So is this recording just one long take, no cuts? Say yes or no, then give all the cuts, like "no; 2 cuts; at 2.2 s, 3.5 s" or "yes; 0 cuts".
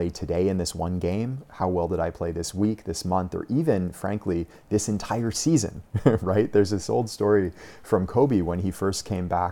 yes; 0 cuts